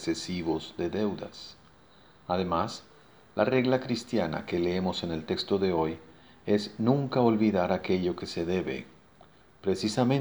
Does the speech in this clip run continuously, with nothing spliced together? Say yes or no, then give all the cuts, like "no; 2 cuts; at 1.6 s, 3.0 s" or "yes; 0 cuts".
yes; 0 cuts